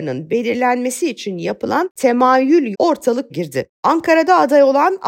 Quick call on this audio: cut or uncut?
cut